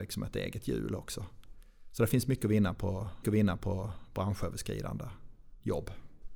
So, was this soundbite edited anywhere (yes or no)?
yes